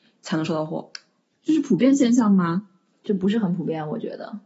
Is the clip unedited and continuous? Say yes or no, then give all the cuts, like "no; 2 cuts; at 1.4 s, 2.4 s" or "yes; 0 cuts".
yes; 0 cuts